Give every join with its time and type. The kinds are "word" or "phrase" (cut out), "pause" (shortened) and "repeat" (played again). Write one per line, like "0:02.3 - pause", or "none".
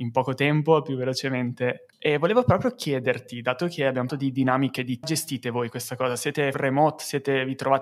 0:04.1 - word
0:05.0 - phrase
0:06.5 - word